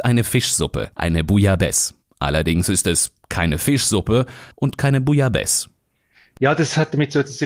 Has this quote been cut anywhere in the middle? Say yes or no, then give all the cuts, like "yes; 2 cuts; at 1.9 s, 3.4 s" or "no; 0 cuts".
yes; 2 cuts; at 0.9 s, 4.5 s